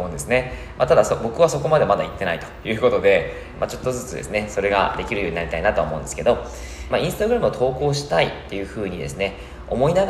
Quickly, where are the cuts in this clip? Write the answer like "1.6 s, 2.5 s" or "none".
3.5 s, 6.9 s